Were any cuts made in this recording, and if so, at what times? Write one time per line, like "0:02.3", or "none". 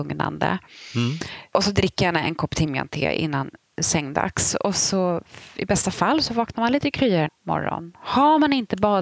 0:07.3